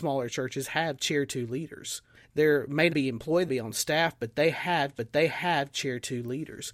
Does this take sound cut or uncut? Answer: cut